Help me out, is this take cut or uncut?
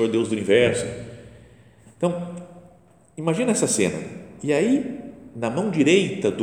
uncut